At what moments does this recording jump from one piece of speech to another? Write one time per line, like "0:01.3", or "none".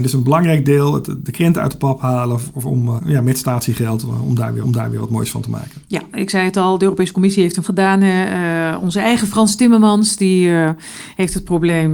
0:03.0
0:04.6
0:07.6